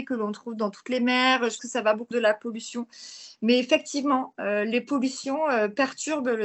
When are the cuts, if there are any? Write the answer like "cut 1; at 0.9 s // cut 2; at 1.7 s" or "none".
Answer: cut 1; at 1.6 s // cut 2; at 2.1 s